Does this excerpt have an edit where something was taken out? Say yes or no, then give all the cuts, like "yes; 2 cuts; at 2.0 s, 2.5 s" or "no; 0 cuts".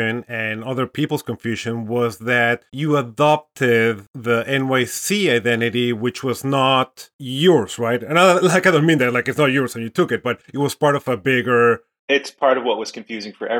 no; 0 cuts